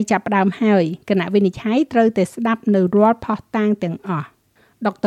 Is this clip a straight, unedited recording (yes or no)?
yes